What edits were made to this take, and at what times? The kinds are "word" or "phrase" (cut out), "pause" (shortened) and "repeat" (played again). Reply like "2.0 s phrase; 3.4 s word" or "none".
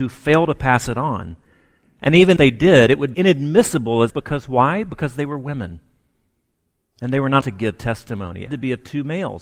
2.4 s word; 3.1 s word; 4.1 s word; 7.4 s word; 8.5 s word

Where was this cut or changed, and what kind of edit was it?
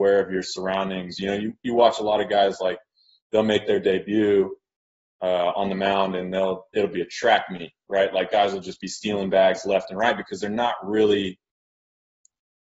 none

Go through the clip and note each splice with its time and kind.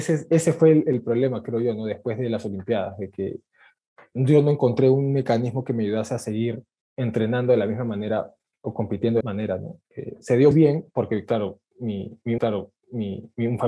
6.8 s word; 9.2 s phrase; 9.8 s pause; 10.5 s word; 12.4 s repeat

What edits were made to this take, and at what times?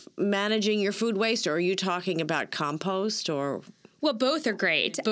none

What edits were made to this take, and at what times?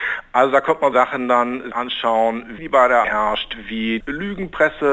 0.9 s word; 1.7 s word; 2.6 s phrase; 3.0 s word; 4.0 s word

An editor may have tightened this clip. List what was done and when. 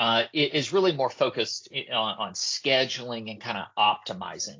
none

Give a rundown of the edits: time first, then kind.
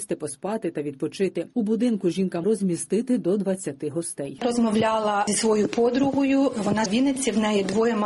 2.4 s word; 6.9 s word

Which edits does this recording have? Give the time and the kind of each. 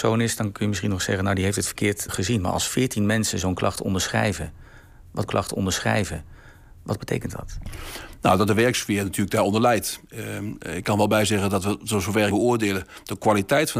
2.1 s word; 5.3 s repeat; 12.3 s phrase

